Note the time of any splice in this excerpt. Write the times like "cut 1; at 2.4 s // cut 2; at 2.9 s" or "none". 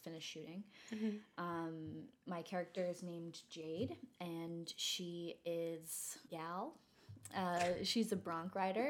cut 1; at 6.3 s